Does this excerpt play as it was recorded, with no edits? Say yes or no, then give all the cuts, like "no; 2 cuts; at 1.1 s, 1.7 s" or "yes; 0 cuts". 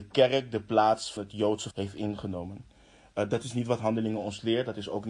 no; 2 cuts; at 1.2 s, 1.7 s